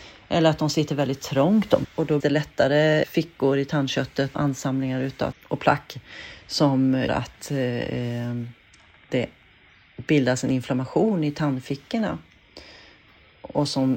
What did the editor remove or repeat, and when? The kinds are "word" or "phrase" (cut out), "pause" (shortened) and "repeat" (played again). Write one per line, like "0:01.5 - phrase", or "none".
0:01.8 - word
0:02.2 - word
0:03.0 - word
0:04.3 - word
0:05.3 - word
0:07.1 - word